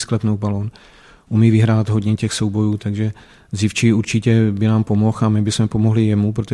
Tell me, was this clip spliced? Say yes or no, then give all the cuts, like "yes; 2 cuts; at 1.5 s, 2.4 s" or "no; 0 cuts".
no; 0 cuts